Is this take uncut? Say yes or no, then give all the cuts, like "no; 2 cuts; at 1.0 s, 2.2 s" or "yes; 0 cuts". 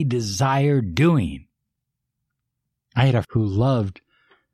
no; 1 cut; at 3.2 s